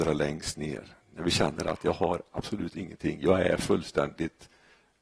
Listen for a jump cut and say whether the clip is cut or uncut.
uncut